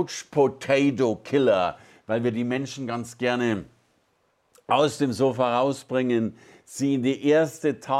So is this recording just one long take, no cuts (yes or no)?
yes